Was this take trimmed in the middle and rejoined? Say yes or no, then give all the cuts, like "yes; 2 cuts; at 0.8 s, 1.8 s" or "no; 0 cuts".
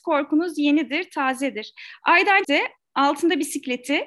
yes; 1 cut; at 2.4 s